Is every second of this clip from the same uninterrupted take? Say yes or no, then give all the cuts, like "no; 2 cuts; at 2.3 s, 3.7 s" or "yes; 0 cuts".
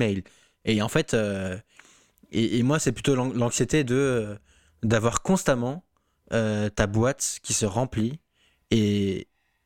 yes; 0 cuts